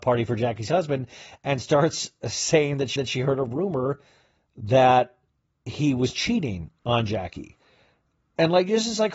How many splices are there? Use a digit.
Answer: 1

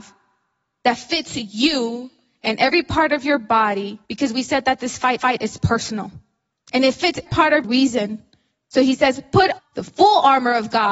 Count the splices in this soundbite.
6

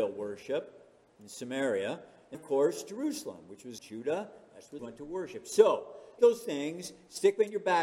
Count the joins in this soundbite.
4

